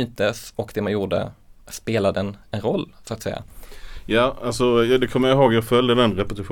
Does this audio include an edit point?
no; 0 cuts

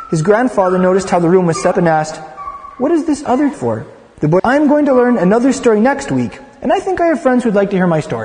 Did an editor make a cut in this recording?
yes; 3 cuts; at 1.7 s, 3.5 s, 4.4 s

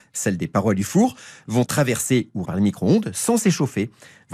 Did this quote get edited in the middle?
yes; 2 cuts; at 1.7 s, 2.4 s

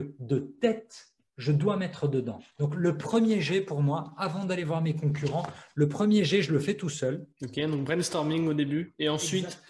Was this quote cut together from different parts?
yes; 2 cuts; at 1.3 s, 2.5 s

